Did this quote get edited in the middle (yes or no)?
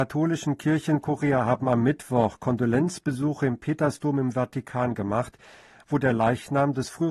no